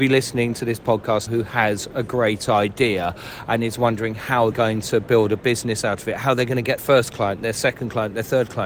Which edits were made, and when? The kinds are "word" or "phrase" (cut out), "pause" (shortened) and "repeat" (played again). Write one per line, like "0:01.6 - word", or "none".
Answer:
0:01.3 - word
0:04.5 - word
0:06.8 - word

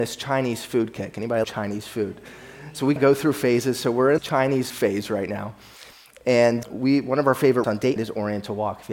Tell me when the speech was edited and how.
0:01.4 - word
0:03.0 - word
0:04.2 - word
0:04.7 - word
0:06.6 - word
0:07.6 - word
0:08.0 - word

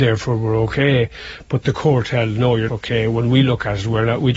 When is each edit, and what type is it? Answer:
0:02.7 - word

